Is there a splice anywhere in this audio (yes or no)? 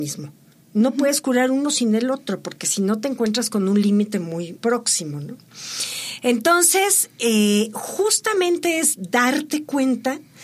yes